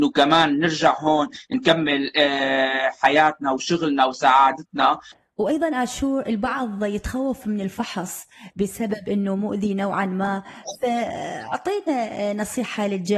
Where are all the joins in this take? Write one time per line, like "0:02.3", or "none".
none